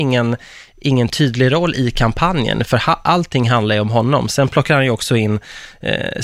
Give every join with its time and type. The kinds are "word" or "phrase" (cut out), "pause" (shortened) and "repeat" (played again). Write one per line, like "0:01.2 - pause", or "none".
none